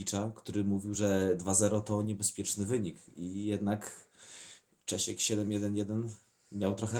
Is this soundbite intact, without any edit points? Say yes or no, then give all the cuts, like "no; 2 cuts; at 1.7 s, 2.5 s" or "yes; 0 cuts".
yes; 0 cuts